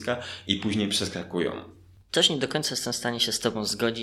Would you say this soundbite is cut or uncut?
uncut